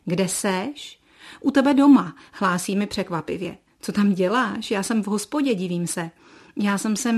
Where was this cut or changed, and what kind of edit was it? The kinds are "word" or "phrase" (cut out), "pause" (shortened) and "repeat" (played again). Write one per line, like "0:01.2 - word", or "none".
none